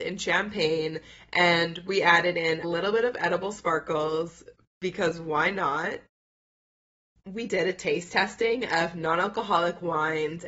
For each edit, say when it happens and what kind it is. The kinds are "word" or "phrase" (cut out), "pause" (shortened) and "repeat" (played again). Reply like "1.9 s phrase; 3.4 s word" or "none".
2.6 s word; 7.5 s word